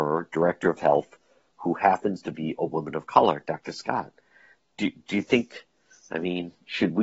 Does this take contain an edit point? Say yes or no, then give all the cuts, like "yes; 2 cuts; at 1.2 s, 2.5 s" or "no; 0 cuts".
no; 0 cuts